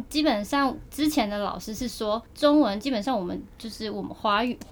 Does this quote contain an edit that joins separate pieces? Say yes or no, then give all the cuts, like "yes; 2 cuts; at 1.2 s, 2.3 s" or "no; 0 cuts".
yes; 1 cut; at 2.3 s